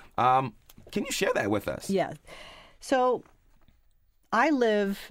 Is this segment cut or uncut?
uncut